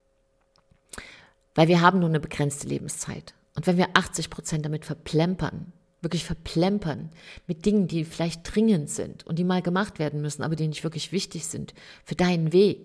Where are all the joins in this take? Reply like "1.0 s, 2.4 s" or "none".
none